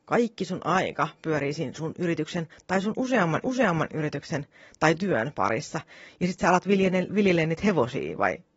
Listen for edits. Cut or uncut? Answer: cut